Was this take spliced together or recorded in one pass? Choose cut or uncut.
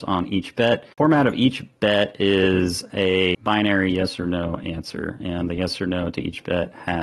cut